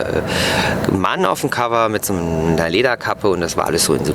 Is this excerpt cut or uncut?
uncut